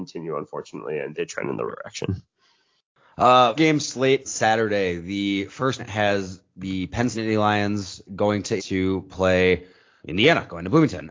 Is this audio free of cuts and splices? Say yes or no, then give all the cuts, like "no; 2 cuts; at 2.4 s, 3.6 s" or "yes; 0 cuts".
no; 9 cuts; at 1.1 s, 1.7 s, 3.6 s, 4.2 s, 5.8 s, 7.1 s, 8.1 s, 8.6 s, 10.0 s